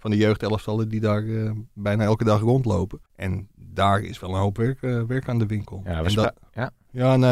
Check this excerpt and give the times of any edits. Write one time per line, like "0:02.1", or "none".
0:03.1